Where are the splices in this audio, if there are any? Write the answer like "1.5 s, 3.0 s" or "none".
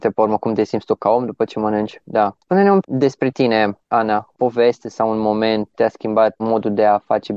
2.8 s, 4.3 s, 5.7 s, 6.4 s